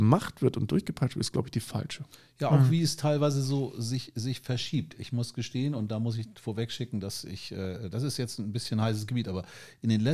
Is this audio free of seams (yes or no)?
yes